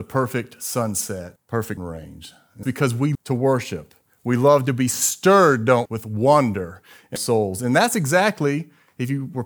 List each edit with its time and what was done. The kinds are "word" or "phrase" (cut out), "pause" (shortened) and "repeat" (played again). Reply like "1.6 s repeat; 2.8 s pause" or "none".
1.4 s word; 1.8 s word; 2.6 s word; 3.1 s word; 5.9 s word; 7.2 s word